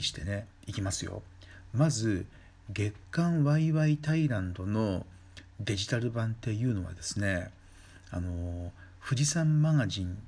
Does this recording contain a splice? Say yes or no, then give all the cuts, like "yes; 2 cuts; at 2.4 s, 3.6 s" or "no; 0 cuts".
no; 0 cuts